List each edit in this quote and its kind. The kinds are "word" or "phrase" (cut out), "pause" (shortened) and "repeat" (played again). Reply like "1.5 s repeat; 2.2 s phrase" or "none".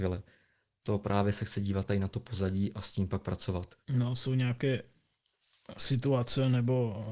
3.8 s pause

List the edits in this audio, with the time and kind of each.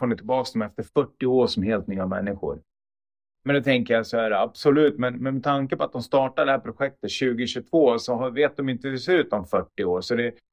none

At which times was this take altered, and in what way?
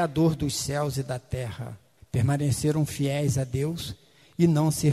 2.0 s pause

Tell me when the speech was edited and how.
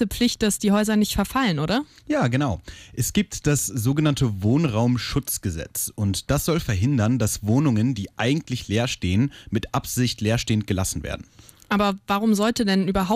none

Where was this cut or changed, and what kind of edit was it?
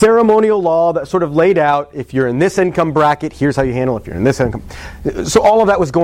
none

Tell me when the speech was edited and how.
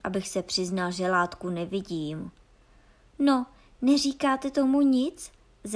none

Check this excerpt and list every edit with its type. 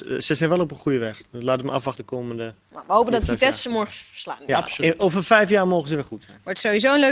2.0 s word

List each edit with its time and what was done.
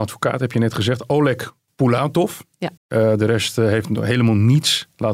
2.8 s pause

